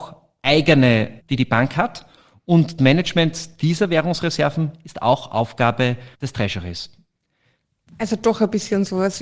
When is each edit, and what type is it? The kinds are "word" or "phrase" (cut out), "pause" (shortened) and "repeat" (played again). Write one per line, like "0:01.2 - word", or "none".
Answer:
0:01.2 - word
0:02.8 - word
0:06.1 - pause

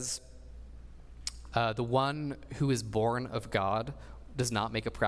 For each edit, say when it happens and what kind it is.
none

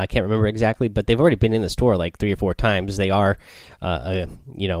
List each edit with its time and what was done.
none

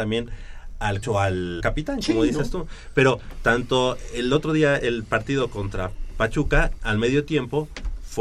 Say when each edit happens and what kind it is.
0:01.0 - word
0:01.6 - phrase

